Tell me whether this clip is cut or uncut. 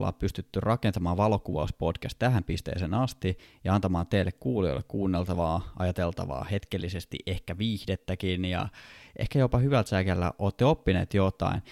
uncut